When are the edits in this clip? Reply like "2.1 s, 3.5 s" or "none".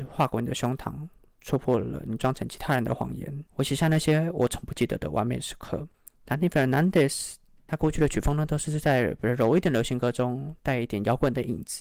3.5 s, 5.9 s